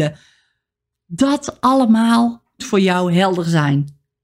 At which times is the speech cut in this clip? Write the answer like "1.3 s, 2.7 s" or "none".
2.6 s